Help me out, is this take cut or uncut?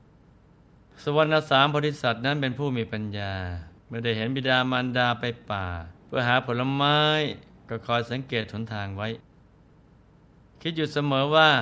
cut